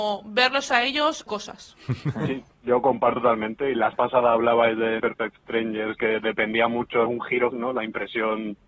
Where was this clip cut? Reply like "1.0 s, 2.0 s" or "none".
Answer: 1.3 s, 3.2 s, 3.9 s, 5.0 s, 7.1 s, 7.5 s